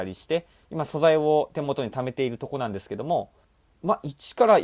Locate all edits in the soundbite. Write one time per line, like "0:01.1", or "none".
0:03.4